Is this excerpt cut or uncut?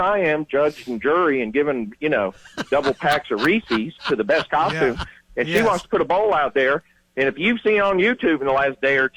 uncut